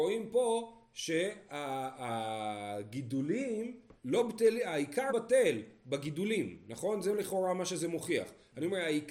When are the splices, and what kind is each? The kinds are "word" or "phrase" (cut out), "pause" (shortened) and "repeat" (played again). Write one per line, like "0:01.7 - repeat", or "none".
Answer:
0:04.0 - pause
0:05.1 - word